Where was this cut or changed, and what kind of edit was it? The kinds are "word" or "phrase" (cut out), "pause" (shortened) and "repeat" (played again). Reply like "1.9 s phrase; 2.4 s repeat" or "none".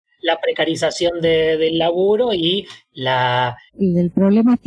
3.7 s pause